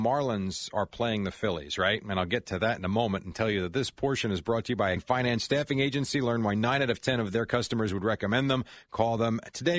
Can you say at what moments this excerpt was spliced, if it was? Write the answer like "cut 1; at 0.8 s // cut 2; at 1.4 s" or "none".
cut 1; at 5.0 s